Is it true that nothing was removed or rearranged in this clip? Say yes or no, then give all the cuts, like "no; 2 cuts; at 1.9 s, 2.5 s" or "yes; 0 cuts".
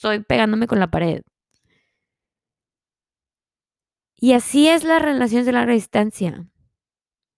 yes; 0 cuts